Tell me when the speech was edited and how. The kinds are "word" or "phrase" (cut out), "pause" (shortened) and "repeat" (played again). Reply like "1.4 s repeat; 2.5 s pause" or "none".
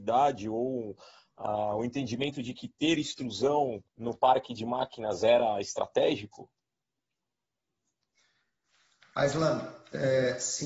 3.9 s pause